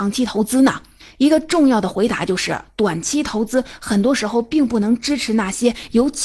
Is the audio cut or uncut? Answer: uncut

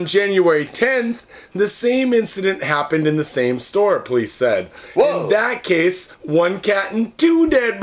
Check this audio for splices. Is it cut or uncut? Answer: cut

